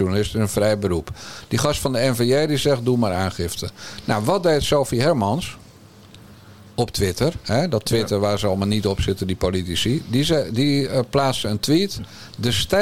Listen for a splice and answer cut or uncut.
uncut